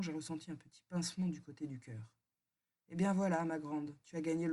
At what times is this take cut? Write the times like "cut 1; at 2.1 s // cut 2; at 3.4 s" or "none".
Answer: none

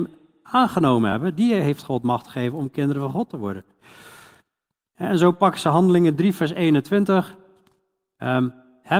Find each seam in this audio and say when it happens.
none

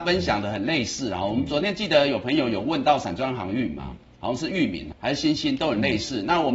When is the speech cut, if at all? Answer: cut 1; at 4.9 s

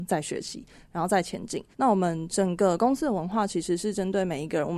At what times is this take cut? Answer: cut 1; at 1.7 s

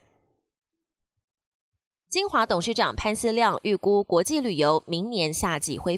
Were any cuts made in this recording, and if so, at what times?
none

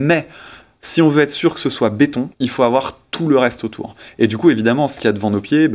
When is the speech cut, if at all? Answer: cut 1; at 2.3 s

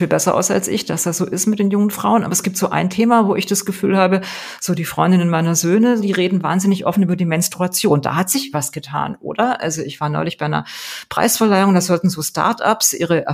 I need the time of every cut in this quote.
cut 1; at 6.0 s // cut 2; at 8.5 s

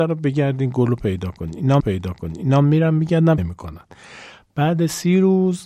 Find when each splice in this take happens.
cut 1; at 1.8 s // cut 2; at 3.4 s

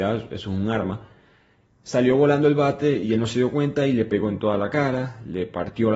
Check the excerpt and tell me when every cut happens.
none

